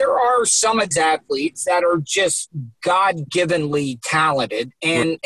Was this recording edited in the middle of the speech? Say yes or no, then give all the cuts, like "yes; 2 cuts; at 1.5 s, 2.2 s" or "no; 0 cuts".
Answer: yes; 1 cut; at 0.9 s